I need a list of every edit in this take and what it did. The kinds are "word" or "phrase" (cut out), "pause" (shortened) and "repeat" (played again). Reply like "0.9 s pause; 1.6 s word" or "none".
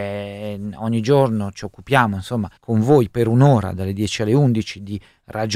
2.6 s pause